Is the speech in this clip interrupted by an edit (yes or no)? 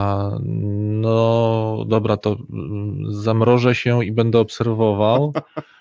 no